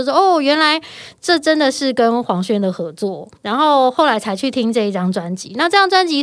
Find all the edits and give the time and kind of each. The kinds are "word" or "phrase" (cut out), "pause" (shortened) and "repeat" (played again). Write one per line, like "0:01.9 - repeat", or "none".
0:03.4 - pause